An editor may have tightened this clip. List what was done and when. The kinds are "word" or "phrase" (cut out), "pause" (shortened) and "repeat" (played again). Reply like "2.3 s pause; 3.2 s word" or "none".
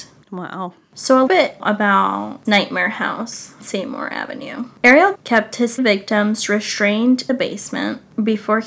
1.3 s word; 2.4 s word; 3.6 s word; 5.1 s word; 5.8 s word; 7.3 s word